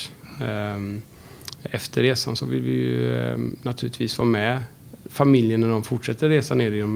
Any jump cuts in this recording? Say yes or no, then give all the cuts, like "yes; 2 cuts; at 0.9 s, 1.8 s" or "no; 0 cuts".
no; 0 cuts